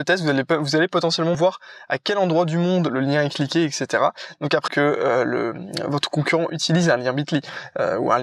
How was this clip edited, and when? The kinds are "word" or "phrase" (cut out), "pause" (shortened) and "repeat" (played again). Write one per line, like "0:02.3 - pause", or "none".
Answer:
0:01.3 - word
0:04.7 - phrase